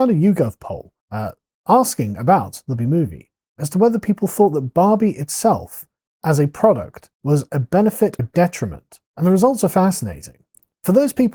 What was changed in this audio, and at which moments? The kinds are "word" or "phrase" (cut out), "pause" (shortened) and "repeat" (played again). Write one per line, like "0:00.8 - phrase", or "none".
0:01.0 - pause
0:02.8 - word
0:07.1 - pause
0:08.2 - word
0:09.1 - pause